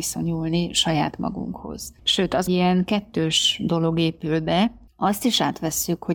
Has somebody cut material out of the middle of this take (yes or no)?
yes